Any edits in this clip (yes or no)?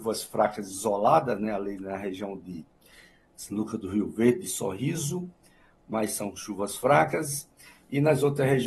no